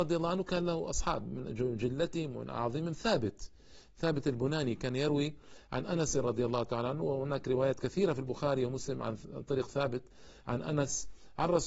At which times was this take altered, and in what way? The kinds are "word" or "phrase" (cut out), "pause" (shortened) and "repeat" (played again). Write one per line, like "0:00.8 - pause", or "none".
none